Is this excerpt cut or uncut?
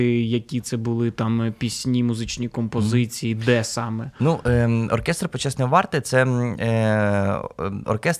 uncut